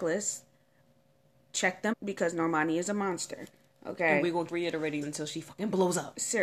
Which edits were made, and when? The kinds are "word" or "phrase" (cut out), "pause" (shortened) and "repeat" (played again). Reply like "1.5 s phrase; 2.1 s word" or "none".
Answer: 1.9 s word; 4.5 s word; 5.0 s word